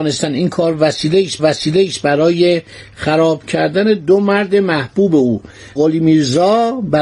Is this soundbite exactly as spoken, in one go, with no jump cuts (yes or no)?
no